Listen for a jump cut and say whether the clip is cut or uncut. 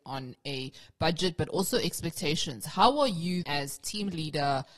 cut